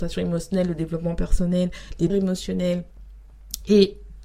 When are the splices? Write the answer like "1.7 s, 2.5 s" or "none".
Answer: 2.1 s